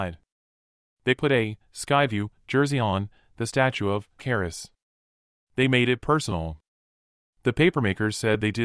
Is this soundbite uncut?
no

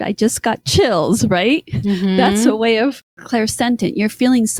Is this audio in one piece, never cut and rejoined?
yes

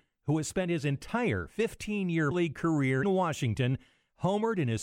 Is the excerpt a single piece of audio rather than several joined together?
no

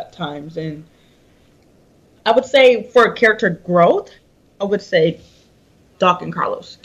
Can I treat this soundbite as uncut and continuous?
yes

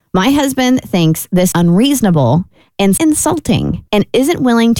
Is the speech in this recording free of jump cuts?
no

